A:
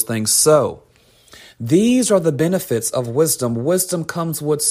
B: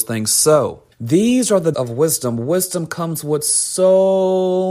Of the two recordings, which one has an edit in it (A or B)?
B